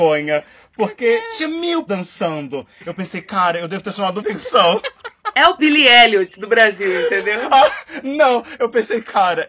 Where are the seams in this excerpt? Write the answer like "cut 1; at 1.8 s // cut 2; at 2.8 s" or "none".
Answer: cut 1; at 1.9 s // cut 2; at 4.2 s // cut 3; at 5.6 s

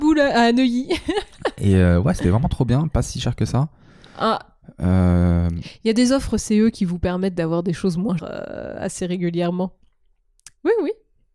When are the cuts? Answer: cut 1; at 8.2 s

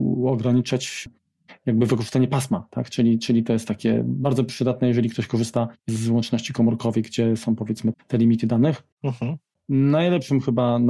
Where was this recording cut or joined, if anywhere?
cut 1; at 5.8 s // cut 2; at 7.9 s // cut 3; at 8.9 s

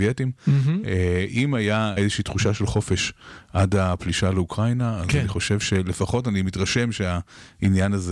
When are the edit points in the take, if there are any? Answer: cut 1; at 2.0 s

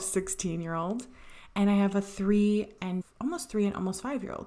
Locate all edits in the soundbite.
cut 1; at 3.0 s

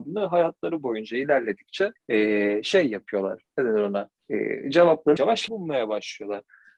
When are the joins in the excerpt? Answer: cut 1; at 2.0 s // cut 2; at 4.2 s // cut 3; at 5.2 s // cut 4; at 5.5 s

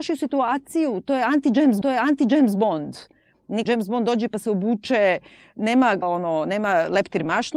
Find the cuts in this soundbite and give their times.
cut 1; at 1.8 s // cut 2; at 3.7 s // cut 3; at 6.0 s

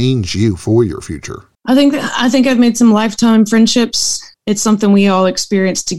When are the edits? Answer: cut 1; at 1.5 s

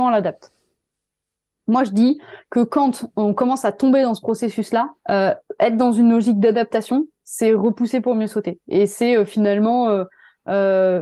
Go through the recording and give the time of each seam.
cut 1; at 5.0 s

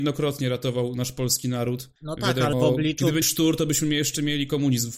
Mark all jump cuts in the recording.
cut 1; at 2.0 s // cut 2; at 2.5 s // cut 3; at 3.2 s

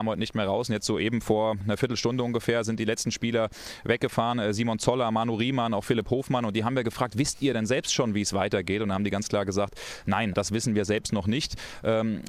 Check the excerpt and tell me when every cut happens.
cut 1; at 1.6 s // cut 2; at 10.3 s

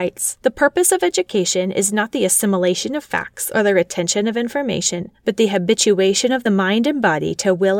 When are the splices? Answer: none

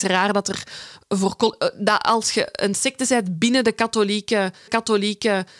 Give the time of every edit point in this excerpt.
cut 1; at 4.7 s

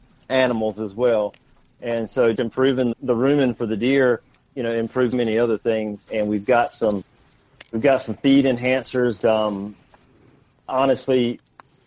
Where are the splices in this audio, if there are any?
cut 1; at 2.3 s // cut 2; at 2.9 s // cut 3; at 4.3 s // cut 4; at 5.1 s // cut 5; at 6.1 s // cut 6; at 9.2 s

